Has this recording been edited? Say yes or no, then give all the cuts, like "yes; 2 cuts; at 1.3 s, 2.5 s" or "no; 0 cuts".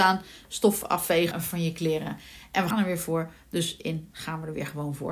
yes; 3 cuts; at 1.3 s, 2.7 s, 4.1 s